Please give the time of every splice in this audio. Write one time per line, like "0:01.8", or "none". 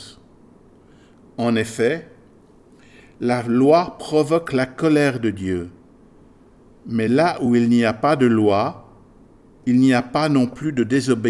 none